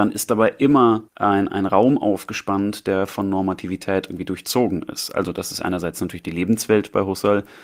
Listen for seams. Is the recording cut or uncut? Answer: cut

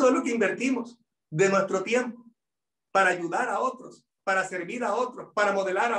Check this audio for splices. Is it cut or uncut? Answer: uncut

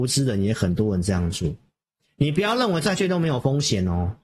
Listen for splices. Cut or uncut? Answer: uncut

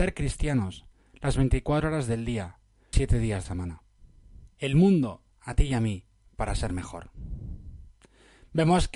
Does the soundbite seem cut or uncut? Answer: cut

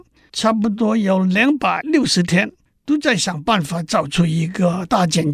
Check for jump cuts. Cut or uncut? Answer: uncut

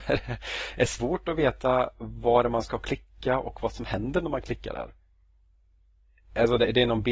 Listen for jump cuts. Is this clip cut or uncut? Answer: uncut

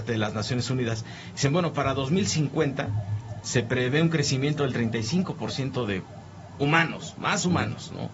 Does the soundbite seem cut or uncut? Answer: uncut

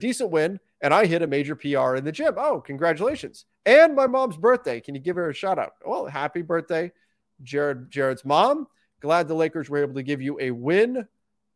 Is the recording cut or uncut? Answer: uncut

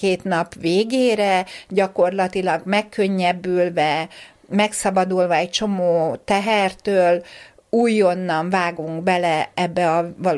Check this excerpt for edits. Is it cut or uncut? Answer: uncut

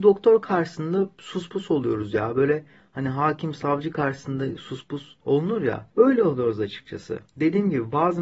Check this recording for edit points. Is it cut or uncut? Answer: uncut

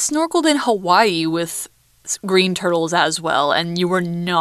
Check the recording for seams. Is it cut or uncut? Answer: uncut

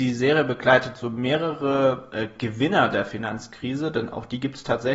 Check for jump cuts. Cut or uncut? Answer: uncut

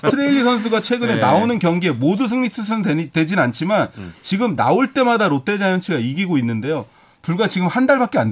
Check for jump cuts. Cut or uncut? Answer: uncut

